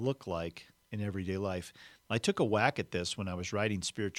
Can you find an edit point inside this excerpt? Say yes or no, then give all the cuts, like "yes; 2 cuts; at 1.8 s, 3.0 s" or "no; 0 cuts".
no; 0 cuts